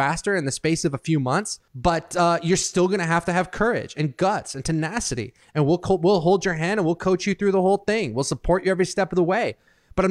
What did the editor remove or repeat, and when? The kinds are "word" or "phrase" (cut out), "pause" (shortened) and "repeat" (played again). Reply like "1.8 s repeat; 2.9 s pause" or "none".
1.7 s pause